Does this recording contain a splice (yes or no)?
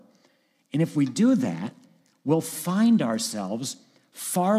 no